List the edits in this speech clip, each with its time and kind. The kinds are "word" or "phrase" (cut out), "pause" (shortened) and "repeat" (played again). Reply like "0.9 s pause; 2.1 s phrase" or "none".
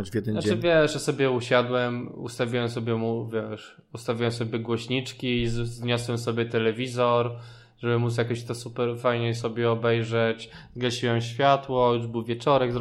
none